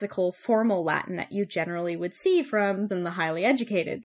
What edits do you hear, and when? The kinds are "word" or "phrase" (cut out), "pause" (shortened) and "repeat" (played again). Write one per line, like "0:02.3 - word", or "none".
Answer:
0:02.9 - word